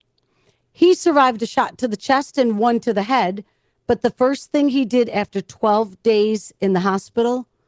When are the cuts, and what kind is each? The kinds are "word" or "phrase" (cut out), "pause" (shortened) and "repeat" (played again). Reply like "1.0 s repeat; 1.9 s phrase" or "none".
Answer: none